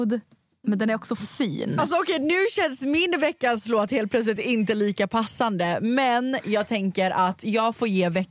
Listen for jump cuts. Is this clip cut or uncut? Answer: uncut